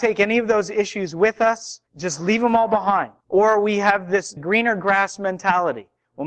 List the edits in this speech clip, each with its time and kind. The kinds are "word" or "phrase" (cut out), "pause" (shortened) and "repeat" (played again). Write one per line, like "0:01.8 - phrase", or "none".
0:01.9 - pause
0:03.2 - pause
0:04.4 - word